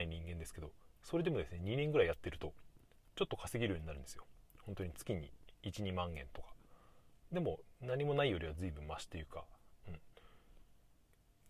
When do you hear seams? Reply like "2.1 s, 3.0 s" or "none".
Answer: none

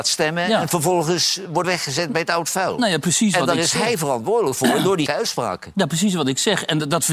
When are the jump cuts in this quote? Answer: 1.6 s, 5.1 s

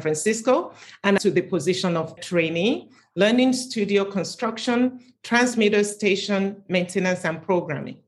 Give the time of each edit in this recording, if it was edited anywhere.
1.2 s, 2.2 s

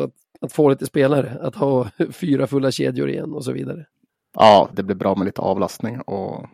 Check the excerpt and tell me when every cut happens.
4.7 s

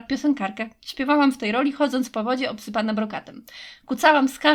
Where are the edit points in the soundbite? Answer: none

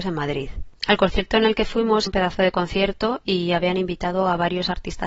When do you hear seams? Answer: 2.1 s

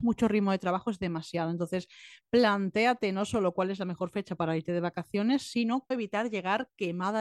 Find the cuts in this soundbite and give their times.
5.9 s

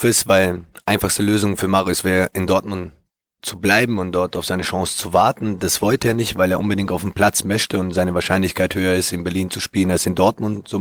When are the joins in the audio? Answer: none

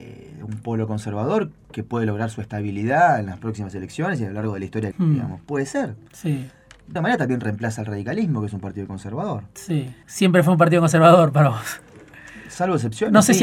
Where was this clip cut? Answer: 4.9 s, 7.0 s

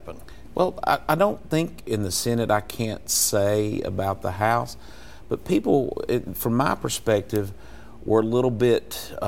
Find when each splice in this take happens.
1.8 s

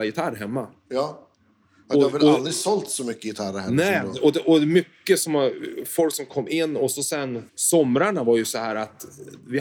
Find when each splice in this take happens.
7.5 s

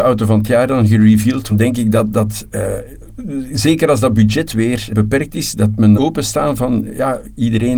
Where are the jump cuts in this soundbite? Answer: 1.5 s, 4.9 s, 5.9 s

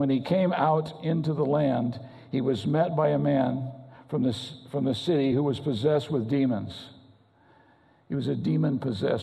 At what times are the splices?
none

